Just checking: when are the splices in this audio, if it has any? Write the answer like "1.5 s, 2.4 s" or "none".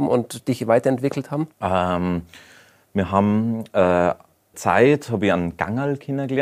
1.5 s, 4.5 s